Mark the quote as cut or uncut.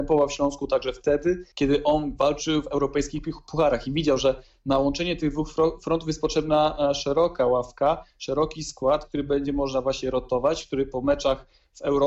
cut